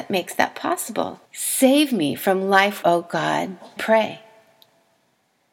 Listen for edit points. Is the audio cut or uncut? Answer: cut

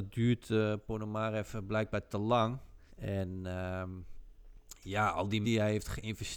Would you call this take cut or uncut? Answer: cut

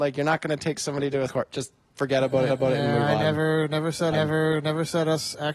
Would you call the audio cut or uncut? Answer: cut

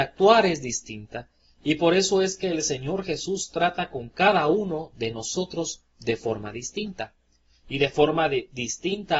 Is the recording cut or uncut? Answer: uncut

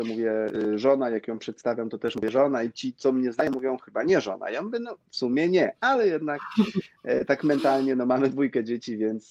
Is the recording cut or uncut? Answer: uncut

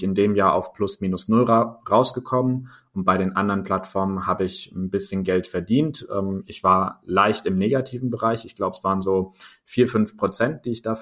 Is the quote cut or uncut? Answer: uncut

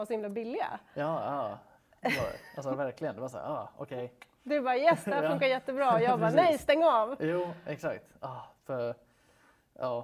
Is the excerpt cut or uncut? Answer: uncut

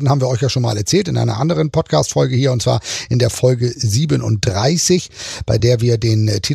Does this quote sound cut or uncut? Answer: uncut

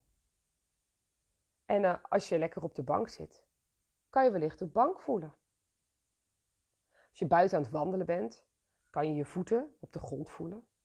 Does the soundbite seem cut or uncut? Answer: uncut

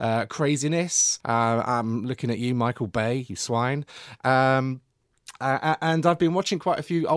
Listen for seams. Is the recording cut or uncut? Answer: cut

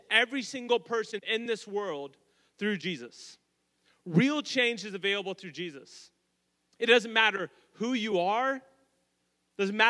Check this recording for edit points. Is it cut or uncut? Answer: uncut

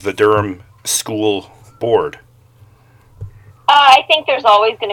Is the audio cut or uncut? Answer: cut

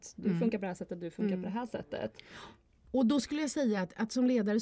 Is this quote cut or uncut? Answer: uncut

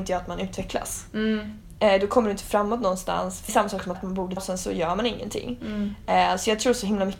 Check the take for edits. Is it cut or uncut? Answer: cut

